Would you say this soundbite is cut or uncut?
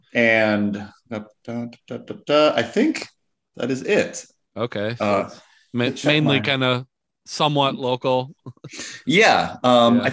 uncut